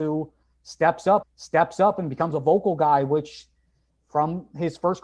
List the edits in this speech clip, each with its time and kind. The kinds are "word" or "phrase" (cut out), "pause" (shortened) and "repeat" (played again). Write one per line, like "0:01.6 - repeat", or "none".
0:01.2 - repeat